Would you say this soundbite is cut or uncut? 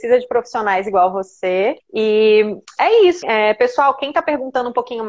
cut